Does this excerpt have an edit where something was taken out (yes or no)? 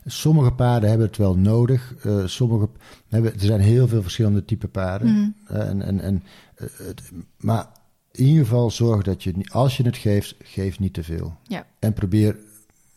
no